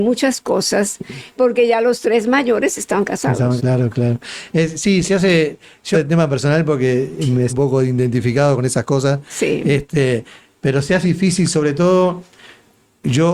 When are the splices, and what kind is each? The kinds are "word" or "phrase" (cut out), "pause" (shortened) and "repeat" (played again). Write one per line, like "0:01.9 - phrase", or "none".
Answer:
0:01.4 - word
0:03.6 - word
0:05.9 - word
0:07.5 - word
0:11.0 - word